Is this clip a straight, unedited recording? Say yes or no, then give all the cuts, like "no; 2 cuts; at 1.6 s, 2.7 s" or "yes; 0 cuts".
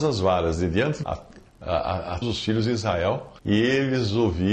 no; 4 cuts; at 1.0 s, 1.5 s, 2.2 s, 3.4 s